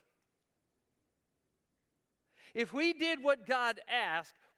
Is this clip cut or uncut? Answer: uncut